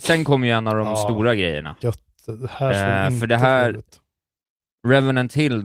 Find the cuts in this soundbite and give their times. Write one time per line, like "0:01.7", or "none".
none